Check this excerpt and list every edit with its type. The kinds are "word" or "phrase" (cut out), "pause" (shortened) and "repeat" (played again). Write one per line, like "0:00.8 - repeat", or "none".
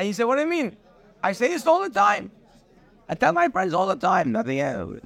none